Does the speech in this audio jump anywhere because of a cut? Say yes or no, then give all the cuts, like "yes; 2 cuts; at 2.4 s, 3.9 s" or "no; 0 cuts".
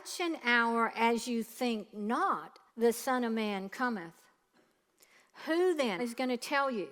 yes; 2 cuts; at 2.7 s, 6.0 s